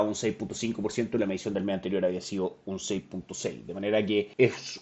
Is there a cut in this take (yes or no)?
no